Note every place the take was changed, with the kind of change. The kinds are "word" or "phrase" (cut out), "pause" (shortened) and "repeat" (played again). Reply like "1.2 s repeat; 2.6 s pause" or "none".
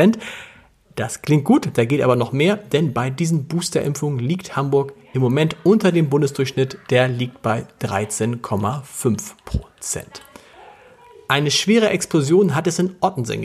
none

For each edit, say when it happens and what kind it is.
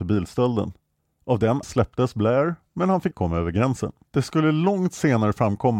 1.6 s word; 3.1 s word; 4.0 s pause

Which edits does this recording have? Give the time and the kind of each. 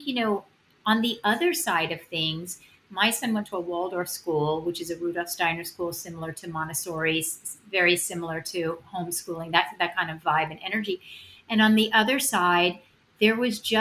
none

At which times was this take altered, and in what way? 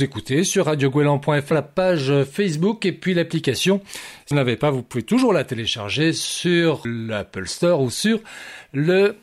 1.5 s word; 4.3 s word; 6.8 s word

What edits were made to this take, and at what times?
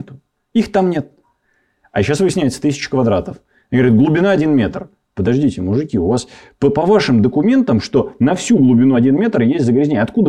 none

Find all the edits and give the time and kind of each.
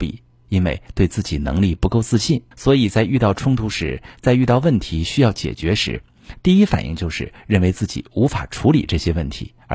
2.5 s pause

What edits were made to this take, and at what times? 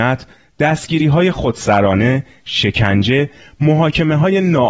none

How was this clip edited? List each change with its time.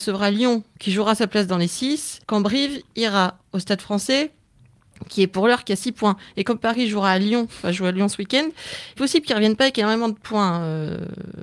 2.2 s pause; 9.0 s phrase

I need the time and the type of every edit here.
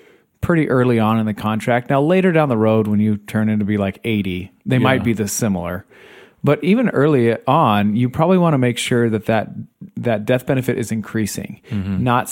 none

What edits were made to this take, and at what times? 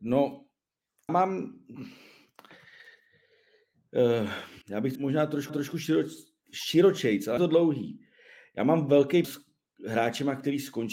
1.1 s word; 4.6 s pause; 5.0 s word; 5.5 s repeat; 7.4 s word; 9.2 s word

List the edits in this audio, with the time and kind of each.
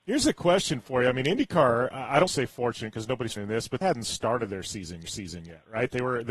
2.3 s word; 3.4 s word; 3.8 s word; 5.1 s repeat

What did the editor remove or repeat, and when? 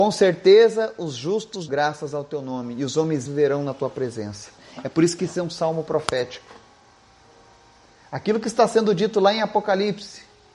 1.7 s word; 3.3 s word

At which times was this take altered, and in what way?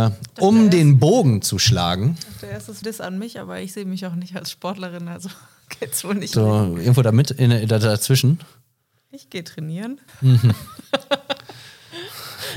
2.8 s phrase; 6.3 s word; 10.1 s pause

